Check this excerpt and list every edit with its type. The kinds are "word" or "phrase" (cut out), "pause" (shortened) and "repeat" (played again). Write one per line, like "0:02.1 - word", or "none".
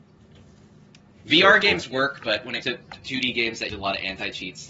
0:02.6 - word
0:03.7 - word